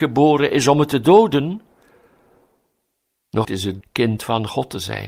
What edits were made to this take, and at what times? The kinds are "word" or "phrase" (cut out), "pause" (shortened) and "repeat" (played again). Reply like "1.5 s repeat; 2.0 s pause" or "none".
3.4 s word; 3.8 s word